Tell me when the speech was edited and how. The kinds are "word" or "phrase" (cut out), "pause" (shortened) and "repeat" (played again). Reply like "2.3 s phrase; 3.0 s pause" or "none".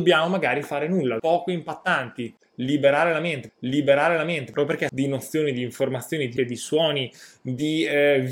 1.2 s phrase; 3.5 s repeat; 4.9 s phrase; 6.4 s word